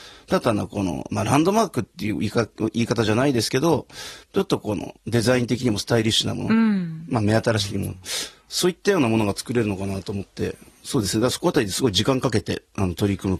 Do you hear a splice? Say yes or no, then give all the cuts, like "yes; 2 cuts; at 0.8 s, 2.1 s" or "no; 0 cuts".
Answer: yes; 1 cut; at 4.2 s